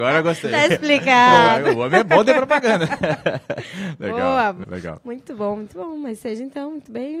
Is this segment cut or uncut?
cut